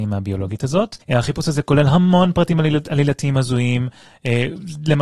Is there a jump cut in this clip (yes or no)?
yes